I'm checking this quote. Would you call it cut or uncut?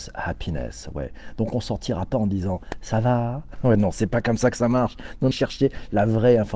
cut